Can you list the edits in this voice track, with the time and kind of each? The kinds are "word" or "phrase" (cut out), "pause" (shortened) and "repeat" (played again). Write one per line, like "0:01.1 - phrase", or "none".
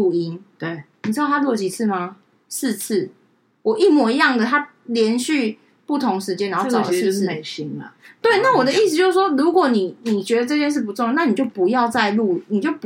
none